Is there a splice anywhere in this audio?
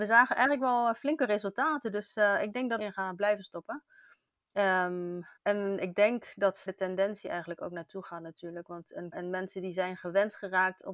yes; 4 cuts; at 2.8 s, 5.4 s, 6.7 s, 9.1 s

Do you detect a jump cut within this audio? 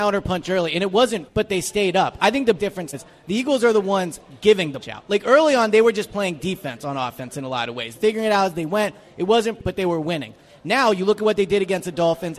yes; 6 cuts; at 1.3 s, 2.6 s, 2.9 s, 4.8 s, 7.9 s, 9.6 s

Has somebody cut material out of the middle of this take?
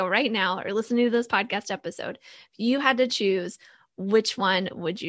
no; 0 cuts

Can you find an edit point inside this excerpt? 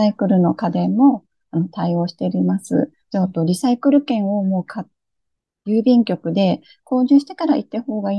yes; 1 cut; at 3.0 s

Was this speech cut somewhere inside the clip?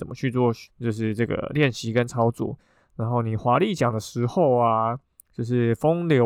no; 0 cuts

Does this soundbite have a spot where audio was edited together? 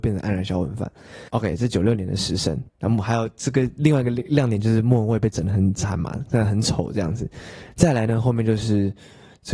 yes; 2 cuts; at 1.3 s, 2.7 s

